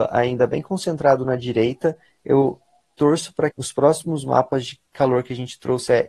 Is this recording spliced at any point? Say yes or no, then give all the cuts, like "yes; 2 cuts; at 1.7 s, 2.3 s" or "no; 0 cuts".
yes; 2 cuts; at 3.5 s, 4.9 s